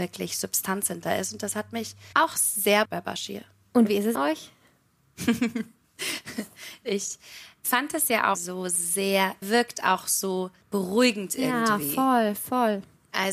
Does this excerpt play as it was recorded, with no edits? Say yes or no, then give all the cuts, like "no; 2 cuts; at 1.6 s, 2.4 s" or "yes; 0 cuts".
no; 6 cuts; at 2.1 s, 2.8 s, 4.1 s, 8.3 s, 9.4 s, 10.6 s